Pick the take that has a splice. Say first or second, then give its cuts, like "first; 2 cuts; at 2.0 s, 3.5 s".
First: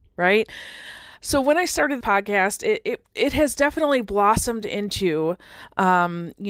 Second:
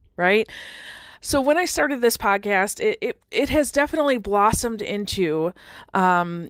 first; 1 cut; at 2.0 s